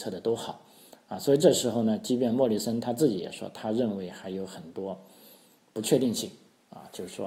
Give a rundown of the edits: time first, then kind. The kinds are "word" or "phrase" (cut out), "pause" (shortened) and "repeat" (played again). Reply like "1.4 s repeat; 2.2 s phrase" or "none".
none